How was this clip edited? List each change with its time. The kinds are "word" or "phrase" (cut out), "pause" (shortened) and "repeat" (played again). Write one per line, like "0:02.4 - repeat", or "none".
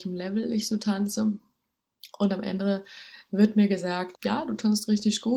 0:04.1 - word